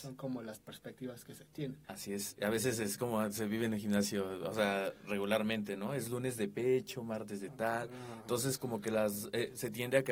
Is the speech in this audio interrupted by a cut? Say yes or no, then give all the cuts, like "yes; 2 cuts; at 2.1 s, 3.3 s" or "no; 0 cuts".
yes; 1 cut; at 1.8 s